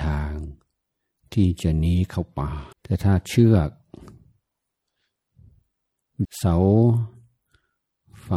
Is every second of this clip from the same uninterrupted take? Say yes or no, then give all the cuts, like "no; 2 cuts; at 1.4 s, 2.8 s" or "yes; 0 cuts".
no; 2 cuts; at 2.7 s, 6.2 s